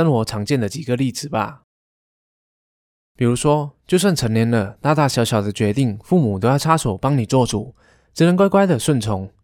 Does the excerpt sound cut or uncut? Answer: uncut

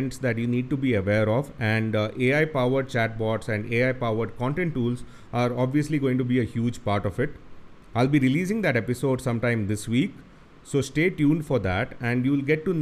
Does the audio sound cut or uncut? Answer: uncut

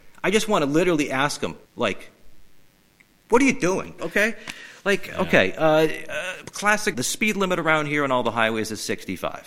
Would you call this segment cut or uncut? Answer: cut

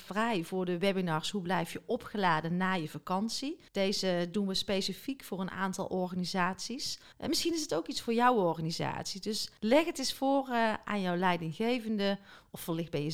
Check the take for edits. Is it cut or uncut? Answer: cut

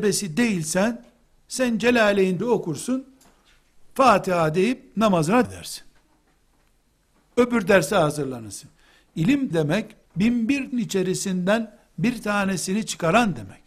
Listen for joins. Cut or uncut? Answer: cut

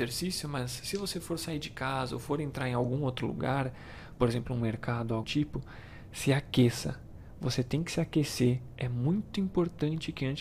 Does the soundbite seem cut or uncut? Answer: cut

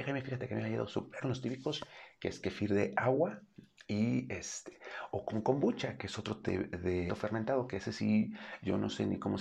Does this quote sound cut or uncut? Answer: cut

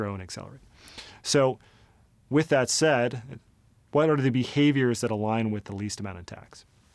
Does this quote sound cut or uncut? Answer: uncut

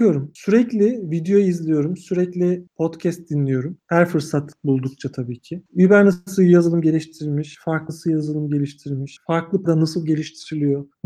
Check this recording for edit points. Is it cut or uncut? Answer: cut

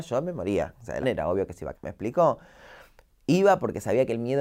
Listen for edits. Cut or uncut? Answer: cut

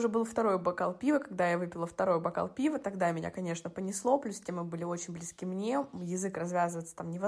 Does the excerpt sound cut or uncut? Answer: uncut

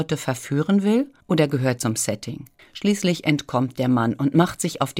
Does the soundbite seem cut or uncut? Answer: cut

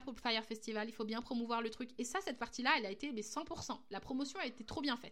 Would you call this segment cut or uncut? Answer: uncut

